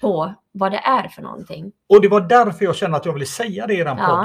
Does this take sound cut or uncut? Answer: uncut